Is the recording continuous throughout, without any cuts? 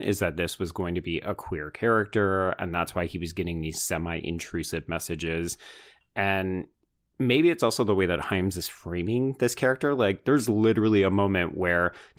yes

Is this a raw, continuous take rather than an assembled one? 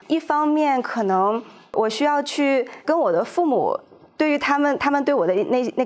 no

